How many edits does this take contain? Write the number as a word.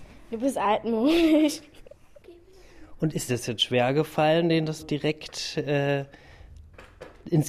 two